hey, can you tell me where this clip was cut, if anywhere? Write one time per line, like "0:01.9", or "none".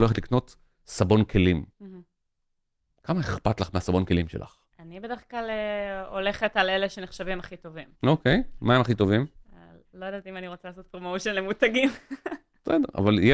0:01.7
0:04.7
0:08.0
0:09.4